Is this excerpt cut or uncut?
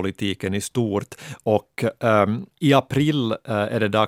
cut